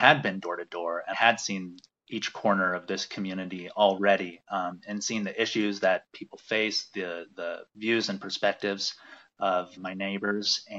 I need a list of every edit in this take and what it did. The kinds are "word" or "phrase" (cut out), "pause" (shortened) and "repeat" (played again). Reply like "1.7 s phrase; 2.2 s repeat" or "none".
1.1 s word; 9.8 s word